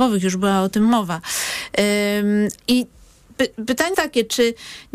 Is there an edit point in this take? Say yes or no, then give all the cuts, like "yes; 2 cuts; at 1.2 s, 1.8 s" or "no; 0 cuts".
yes; 2 cuts; at 2.6 s, 3.9 s